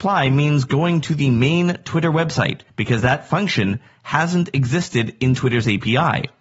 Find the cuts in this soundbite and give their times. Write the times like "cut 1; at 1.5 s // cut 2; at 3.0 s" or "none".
cut 1; at 2.7 s